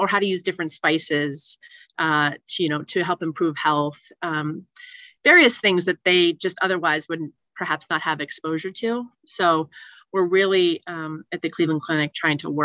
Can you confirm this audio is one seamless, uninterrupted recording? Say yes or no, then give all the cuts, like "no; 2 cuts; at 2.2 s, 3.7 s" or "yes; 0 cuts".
yes; 0 cuts